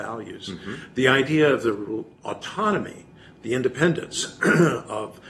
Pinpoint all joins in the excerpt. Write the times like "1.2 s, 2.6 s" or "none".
2.1 s